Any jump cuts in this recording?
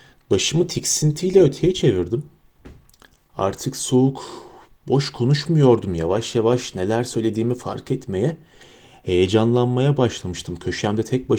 no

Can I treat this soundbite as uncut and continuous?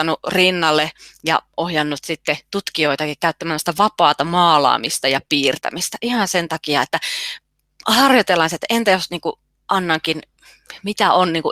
yes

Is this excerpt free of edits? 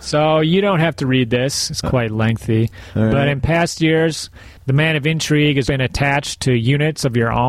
no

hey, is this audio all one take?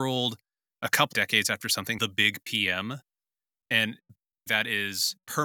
no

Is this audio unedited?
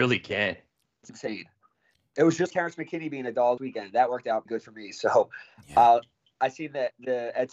no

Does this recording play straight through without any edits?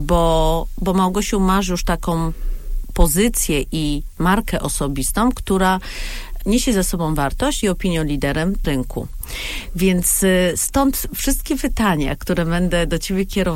no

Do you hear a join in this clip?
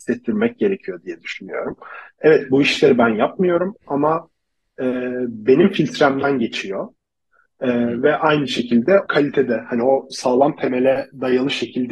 yes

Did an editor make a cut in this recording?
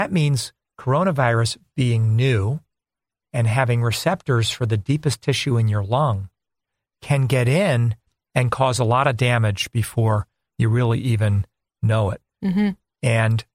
no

